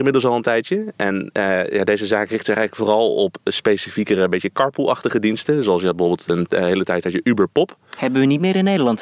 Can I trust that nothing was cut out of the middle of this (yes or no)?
yes